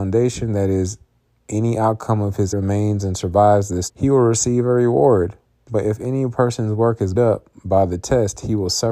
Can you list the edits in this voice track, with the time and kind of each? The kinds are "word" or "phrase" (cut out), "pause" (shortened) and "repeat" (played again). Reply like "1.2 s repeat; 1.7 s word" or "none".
2.5 s word; 3.9 s word; 7.2 s word